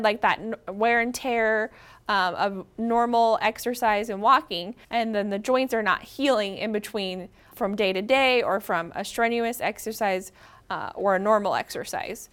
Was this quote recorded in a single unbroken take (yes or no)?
no